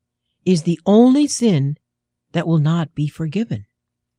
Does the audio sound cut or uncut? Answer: uncut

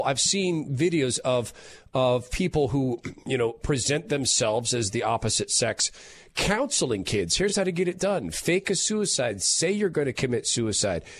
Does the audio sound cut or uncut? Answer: uncut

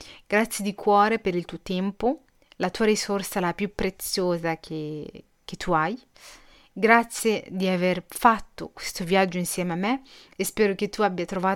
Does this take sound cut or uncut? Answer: uncut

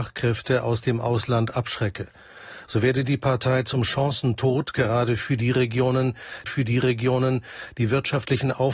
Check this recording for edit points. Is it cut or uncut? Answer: cut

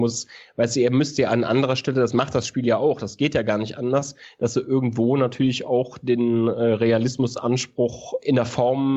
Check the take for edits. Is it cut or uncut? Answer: uncut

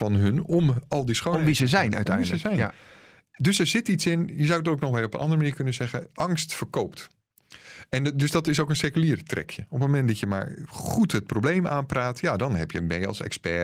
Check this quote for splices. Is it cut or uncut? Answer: uncut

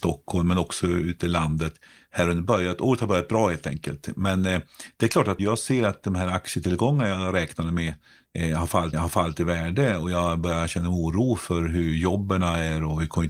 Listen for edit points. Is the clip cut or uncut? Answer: cut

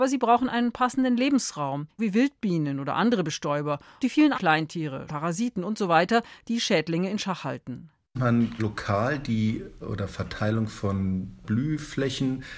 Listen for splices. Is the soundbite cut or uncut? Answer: cut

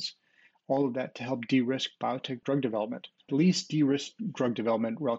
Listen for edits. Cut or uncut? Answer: cut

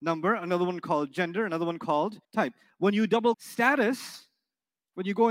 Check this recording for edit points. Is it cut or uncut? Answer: cut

